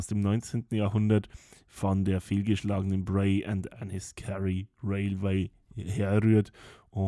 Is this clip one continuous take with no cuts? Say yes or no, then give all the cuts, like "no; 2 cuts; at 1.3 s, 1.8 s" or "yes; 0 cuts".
yes; 0 cuts